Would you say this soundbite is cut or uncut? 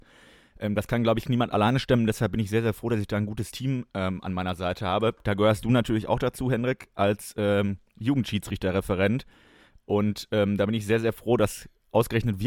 uncut